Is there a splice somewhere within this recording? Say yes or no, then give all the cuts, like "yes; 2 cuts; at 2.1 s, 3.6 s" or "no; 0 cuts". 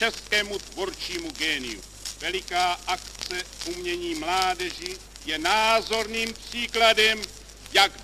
no; 0 cuts